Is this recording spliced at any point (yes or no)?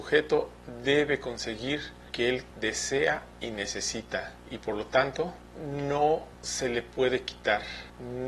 yes